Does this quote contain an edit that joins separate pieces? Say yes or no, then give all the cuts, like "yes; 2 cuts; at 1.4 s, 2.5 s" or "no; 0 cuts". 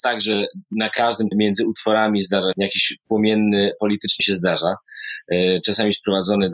yes; 3 cuts; at 1.3 s, 2.5 s, 4.2 s